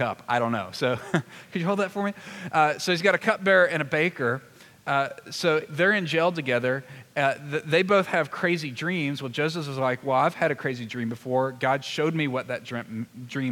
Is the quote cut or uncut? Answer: uncut